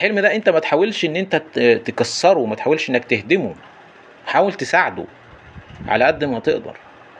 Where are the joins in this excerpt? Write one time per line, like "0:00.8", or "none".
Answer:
none